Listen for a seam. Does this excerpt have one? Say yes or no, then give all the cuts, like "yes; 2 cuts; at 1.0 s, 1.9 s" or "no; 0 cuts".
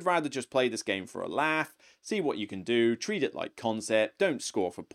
no; 0 cuts